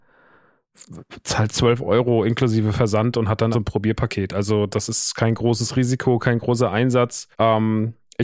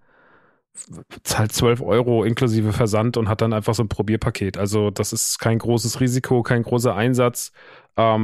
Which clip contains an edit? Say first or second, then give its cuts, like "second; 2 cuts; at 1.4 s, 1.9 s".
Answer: first; 2 cuts; at 3.5 s, 7.3 s